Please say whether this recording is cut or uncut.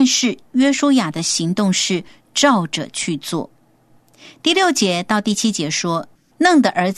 uncut